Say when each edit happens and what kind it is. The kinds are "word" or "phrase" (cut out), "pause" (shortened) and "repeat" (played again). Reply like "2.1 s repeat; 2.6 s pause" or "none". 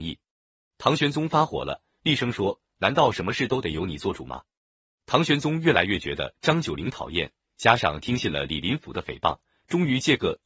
none